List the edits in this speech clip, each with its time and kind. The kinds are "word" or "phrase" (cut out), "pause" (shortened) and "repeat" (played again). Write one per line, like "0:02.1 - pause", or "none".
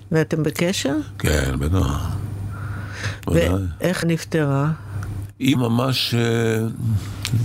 0:04.0 - word
0:05.6 - word

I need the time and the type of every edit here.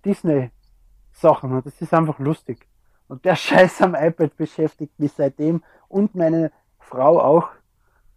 none

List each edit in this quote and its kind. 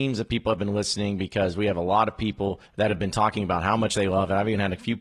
0:02.7 - pause

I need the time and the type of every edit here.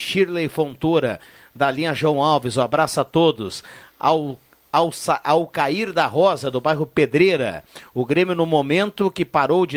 none

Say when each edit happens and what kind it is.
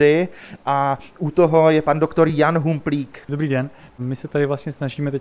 none

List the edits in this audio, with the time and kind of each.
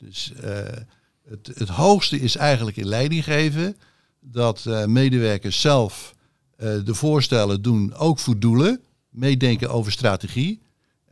0:01.5 - word

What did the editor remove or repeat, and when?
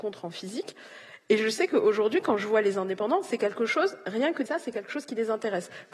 0:04.5 - word

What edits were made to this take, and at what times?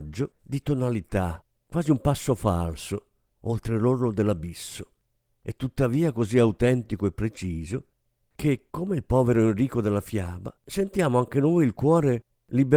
0:10.6 - pause

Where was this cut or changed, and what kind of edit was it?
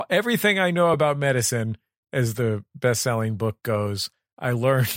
none

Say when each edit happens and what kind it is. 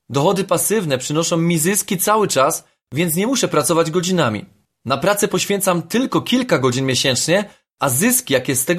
none

